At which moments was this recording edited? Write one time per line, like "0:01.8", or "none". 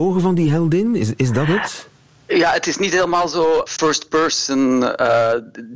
0:03.7